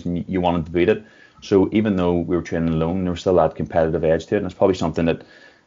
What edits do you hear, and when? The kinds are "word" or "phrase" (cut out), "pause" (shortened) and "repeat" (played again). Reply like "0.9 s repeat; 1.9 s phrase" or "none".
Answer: none